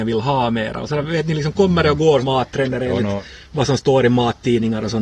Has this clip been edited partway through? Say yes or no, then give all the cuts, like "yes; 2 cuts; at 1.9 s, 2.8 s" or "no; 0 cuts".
yes; 1 cut; at 2.2 s